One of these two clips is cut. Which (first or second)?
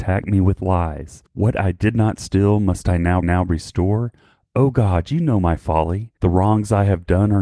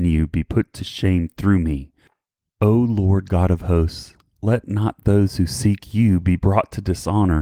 first